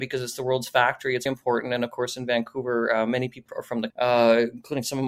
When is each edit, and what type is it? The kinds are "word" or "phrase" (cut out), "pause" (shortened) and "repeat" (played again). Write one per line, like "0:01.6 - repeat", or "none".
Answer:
0:01.3 - word
0:03.5 - word
0:03.9 - word